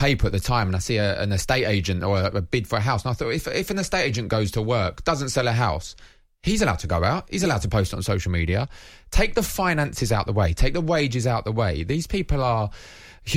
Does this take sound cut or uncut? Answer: uncut